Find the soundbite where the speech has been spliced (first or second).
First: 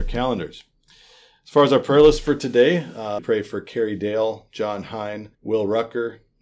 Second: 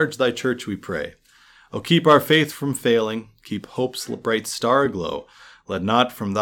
first